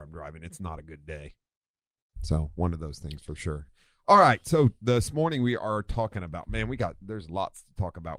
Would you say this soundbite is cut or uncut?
uncut